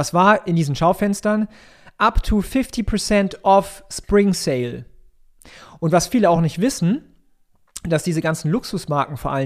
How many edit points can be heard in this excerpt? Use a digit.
0